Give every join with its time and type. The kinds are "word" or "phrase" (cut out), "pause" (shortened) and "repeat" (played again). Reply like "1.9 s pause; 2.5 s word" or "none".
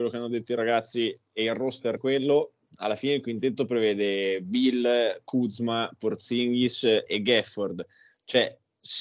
2.0 s word; 7.1 s word